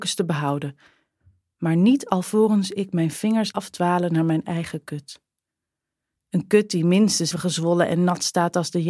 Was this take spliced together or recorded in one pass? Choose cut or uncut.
cut